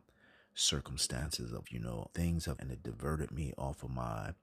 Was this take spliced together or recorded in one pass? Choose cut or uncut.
cut